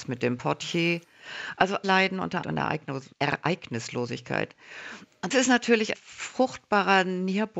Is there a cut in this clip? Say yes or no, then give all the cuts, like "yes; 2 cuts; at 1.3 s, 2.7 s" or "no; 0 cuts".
yes; 5 cuts; at 1.8 s, 2.4 s, 3.1 s, 5.3 s, 5.9 s